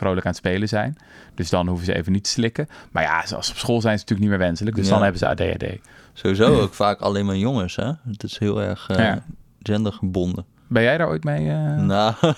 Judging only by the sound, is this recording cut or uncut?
uncut